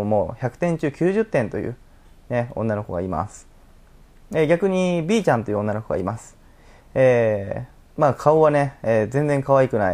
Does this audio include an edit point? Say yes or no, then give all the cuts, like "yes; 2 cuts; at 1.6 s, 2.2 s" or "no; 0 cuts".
no; 0 cuts